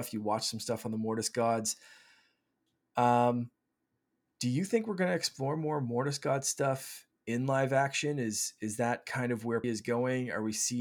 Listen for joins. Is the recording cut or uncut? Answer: cut